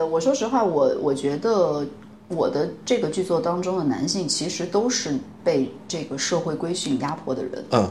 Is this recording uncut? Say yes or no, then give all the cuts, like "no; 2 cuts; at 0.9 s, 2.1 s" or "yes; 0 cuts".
yes; 0 cuts